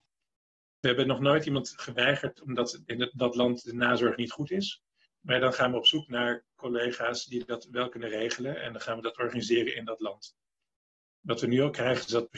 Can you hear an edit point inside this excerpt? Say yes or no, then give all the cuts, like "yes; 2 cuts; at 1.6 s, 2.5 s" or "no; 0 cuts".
no; 0 cuts